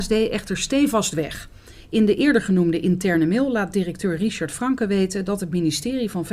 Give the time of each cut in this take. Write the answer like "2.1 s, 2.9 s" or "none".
none